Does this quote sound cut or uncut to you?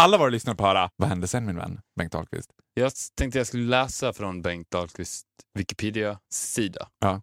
uncut